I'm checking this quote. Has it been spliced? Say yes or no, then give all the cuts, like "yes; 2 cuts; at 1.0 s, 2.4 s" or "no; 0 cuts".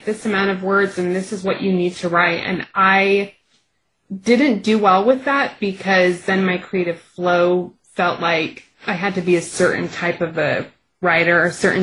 yes; 1 cut; at 8.7 s